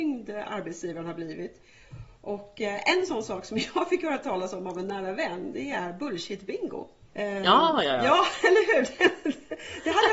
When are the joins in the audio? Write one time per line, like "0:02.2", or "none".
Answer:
0:07.1